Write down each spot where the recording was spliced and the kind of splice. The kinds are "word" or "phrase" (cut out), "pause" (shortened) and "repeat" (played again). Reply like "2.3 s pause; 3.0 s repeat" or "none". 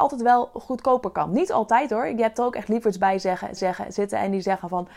3.6 s repeat

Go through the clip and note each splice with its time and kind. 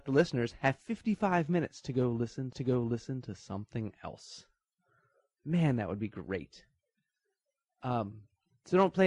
2.5 s repeat

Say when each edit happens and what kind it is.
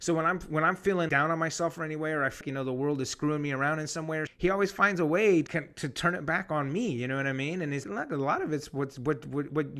1.1 s word; 2.4 s word; 4.3 s word; 5.5 s word; 7.8 s word

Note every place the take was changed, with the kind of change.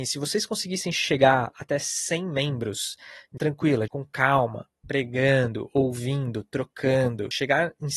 3.4 s word; 3.9 s word

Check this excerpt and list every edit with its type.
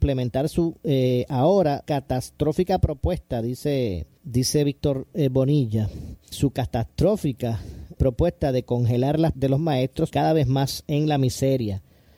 1.8 s word; 4.2 s pause; 6.3 s word; 8.0 s word; 9.3 s word; 10.1 s word

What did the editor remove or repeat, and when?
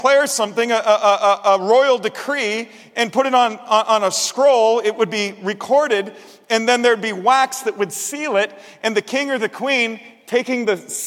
none

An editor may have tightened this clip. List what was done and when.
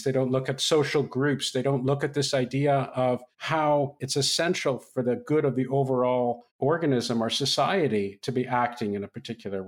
3.3 s pause; 6.5 s pause

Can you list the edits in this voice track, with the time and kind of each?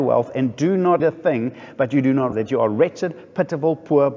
1.0 s word; 2.3 s word

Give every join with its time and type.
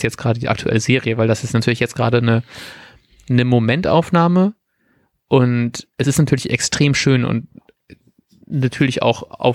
none

